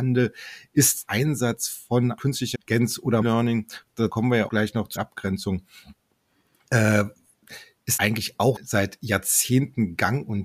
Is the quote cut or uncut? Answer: cut